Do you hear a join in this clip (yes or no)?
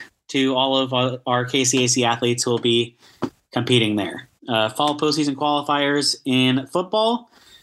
yes